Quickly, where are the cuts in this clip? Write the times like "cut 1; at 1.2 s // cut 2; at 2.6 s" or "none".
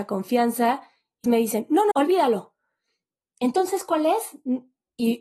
cut 1; at 1.2 s // cut 2; at 1.9 s